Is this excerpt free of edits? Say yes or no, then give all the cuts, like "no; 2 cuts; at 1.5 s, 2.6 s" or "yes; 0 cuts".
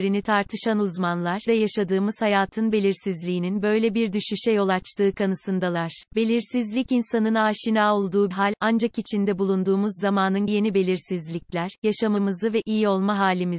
no; 4 cuts; at 1.5 s, 6.1 s, 8.3 s, 10.5 s